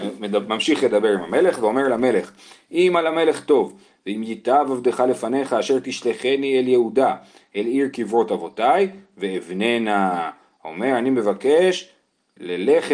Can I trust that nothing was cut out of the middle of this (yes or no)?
yes